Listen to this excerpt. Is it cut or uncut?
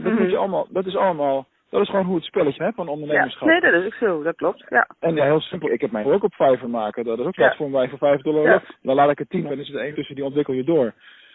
cut